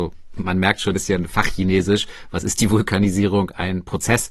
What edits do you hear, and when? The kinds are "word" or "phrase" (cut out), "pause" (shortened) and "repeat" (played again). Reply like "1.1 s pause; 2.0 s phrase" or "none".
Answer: 0.9 s phrase